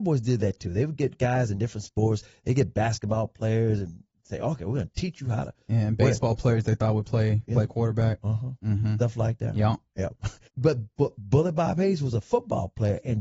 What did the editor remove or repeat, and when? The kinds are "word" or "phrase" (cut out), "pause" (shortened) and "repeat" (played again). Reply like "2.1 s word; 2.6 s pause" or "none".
7.4 s word; 10.5 s pause